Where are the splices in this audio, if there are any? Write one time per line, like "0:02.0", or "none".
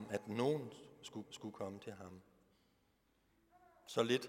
0:01.2